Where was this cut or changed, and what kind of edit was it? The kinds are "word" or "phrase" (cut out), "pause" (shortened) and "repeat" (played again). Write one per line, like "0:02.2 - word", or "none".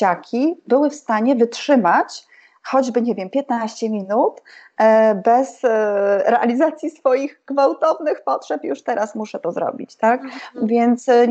none